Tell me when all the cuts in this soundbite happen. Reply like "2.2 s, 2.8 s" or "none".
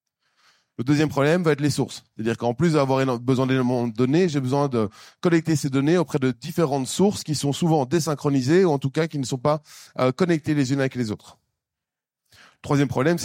none